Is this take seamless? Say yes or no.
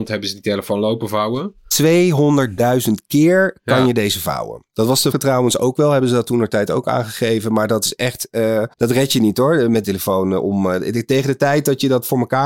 no